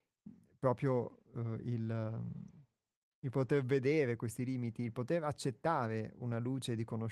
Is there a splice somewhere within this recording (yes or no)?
no